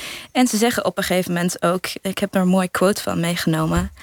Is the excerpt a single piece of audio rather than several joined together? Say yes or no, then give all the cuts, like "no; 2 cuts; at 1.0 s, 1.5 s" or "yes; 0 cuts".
yes; 0 cuts